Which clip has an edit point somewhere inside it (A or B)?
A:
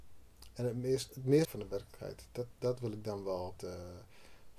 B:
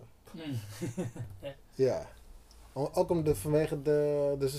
A